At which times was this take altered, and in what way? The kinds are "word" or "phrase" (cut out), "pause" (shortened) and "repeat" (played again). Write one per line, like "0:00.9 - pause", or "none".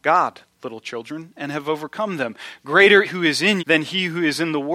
0:03.0 - phrase
0:03.6 - word